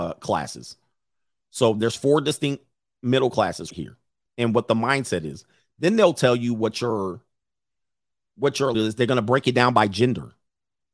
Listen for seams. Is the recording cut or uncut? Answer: cut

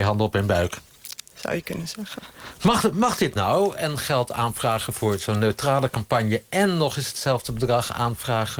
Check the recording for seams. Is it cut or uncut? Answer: uncut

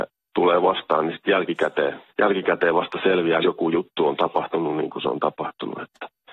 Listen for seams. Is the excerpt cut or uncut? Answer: cut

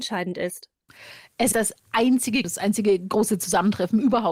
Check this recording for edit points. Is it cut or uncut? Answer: cut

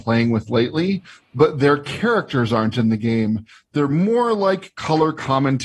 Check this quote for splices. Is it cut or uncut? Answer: uncut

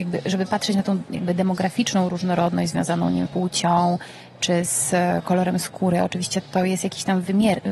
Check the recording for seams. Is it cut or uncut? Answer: cut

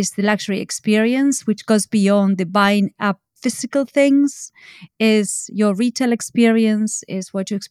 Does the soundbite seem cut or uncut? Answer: uncut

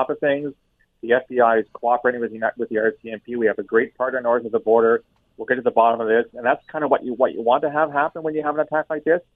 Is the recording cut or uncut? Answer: uncut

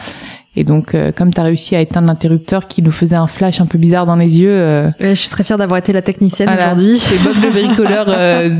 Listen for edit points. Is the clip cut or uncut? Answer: uncut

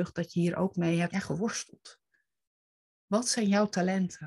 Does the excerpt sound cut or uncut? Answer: cut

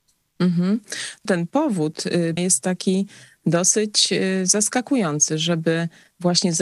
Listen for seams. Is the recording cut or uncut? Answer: cut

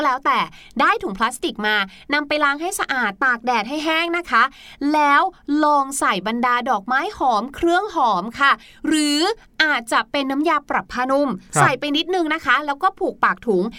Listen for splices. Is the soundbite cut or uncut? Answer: uncut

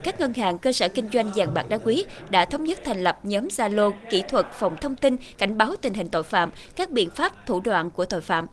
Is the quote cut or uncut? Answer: cut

